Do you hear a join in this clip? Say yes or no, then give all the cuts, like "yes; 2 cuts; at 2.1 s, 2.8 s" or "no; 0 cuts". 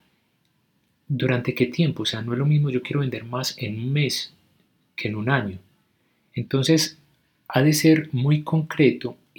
no; 0 cuts